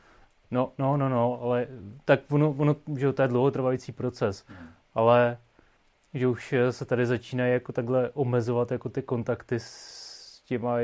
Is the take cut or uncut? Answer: uncut